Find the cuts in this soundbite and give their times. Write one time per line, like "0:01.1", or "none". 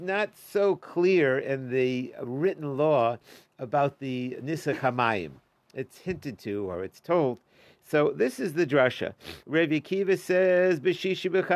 none